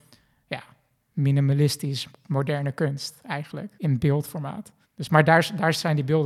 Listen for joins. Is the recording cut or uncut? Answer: cut